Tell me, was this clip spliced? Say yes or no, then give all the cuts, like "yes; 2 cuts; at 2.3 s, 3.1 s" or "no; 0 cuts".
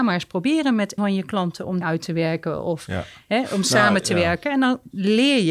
yes; 2 cuts; at 1.0 s, 1.8 s